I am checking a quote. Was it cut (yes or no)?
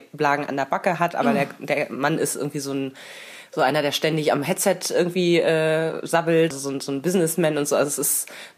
yes